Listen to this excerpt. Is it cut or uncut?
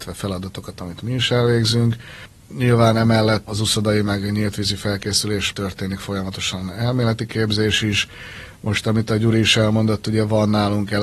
cut